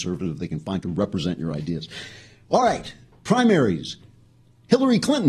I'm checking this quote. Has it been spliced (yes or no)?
no